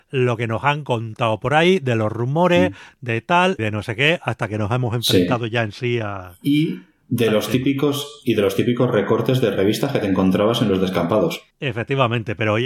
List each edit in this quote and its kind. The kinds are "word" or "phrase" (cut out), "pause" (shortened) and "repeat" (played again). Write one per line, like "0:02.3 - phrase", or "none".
0:03.6 - word
0:11.5 - pause